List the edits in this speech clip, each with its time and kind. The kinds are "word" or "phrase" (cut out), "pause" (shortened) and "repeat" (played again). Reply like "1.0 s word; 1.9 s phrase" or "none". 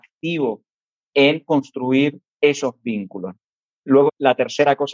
2.3 s pause

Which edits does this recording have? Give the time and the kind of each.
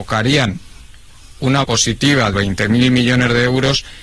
1.6 s phrase; 2.3 s word

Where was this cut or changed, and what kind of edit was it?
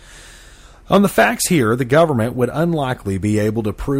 none

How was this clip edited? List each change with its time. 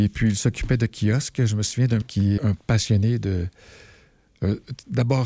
2.0 s word; 2.4 s word

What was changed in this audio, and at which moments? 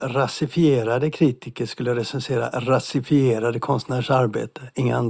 none

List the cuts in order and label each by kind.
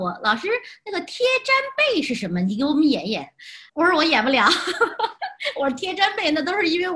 3.7 s pause

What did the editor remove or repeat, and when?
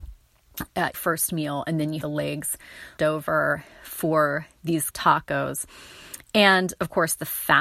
0.9 s word; 2.0 s word; 3.0 s word; 4.9 s word

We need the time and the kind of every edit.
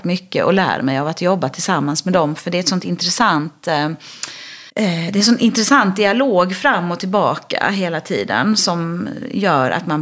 4.7 s pause

